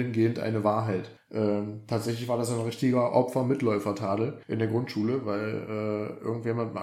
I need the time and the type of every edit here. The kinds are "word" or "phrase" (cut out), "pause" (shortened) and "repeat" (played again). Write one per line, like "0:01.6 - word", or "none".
0:01.2 - pause
0:04.4 - pause

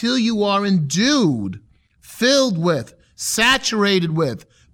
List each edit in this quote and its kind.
none

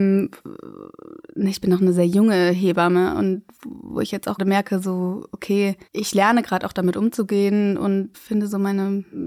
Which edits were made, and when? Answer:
0:04.4 - word
0:08.1 - word

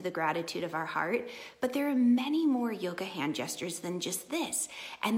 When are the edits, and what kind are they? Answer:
none

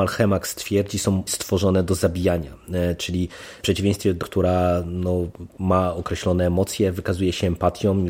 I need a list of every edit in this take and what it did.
0:01.3 - phrase
0:03.6 - word
0:04.2 - word

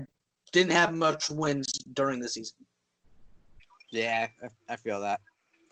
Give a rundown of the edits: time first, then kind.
0:03.7 - pause

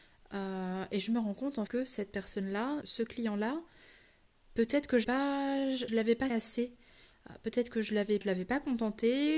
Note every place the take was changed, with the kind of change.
0:01.7 - word
0:02.8 - word
0:05.0 - word
0:05.9 - word
0:06.3 - word
0:08.2 - word

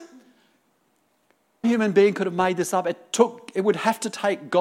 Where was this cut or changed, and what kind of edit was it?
0:01.6 - word

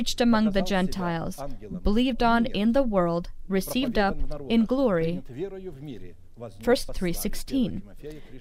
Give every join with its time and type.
0:06.9 - word

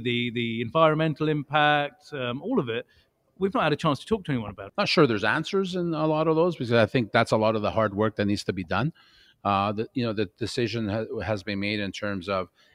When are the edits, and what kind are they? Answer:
none

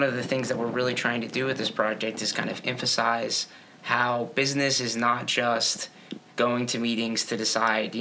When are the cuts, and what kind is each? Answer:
none

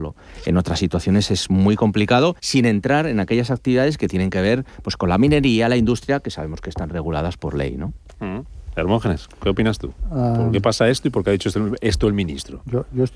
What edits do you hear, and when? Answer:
0:02.4 - pause

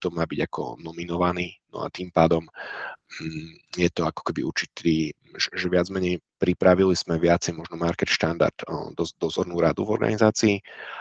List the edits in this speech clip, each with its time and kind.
none

